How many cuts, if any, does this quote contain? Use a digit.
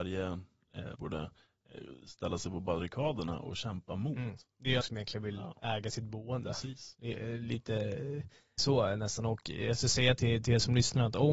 4